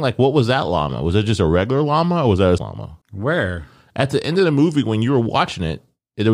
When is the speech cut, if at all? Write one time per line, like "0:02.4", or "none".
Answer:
0:02.6
0:03.0

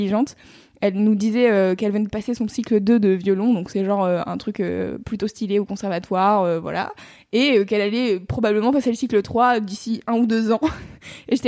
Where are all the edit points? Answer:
none

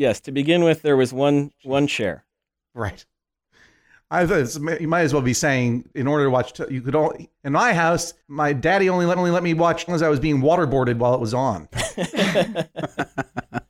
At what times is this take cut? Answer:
0:08.2
0:09.2
0:09.9

